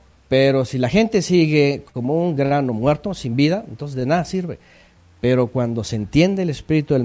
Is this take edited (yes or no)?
no